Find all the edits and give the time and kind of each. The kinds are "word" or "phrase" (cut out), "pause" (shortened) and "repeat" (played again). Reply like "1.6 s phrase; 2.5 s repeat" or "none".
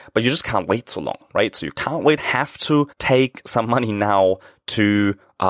2.2 s phrase; 2.9 s pause